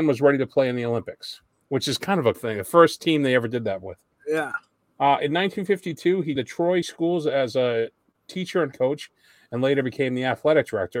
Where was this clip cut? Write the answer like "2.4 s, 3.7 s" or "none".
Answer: 2.3 s, 6.4 s, 6.8 s, 8.7 s